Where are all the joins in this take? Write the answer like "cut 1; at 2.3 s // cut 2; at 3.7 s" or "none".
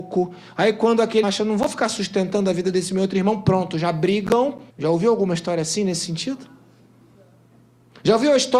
cut 1; at 1.2 s // cut 2; at 4.7 s

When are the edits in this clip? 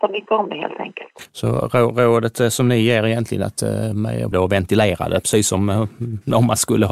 cut 1; at 4.3 s

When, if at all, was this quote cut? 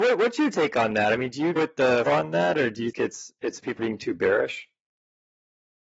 cut 1; at 1.6 s // cut 2; at 2.1 s // cut 3; at 2.9 s // cut 4; at 3.8 s

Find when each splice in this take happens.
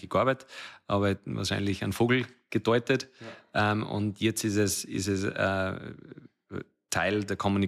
none

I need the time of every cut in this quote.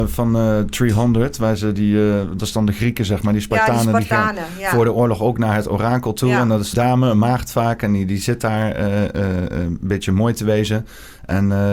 cut 1; at 6.7 s

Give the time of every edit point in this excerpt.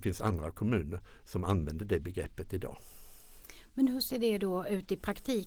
none

